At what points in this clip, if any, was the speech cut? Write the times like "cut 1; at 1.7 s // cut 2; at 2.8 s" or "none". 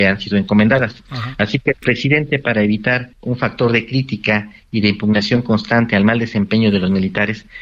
cut 1; at 3.1 s